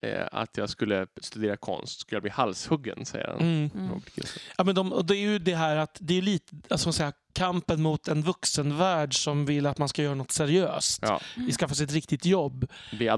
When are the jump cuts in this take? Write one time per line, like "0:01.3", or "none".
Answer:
none